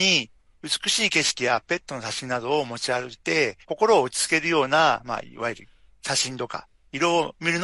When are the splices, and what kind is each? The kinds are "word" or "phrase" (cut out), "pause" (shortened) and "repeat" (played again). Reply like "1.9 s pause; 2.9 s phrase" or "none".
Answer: 3.6 s pause